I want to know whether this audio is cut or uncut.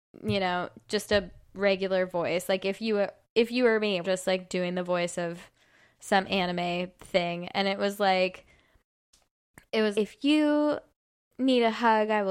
cut